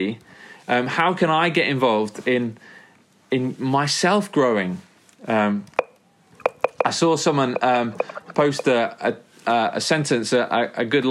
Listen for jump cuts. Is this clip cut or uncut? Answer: uncut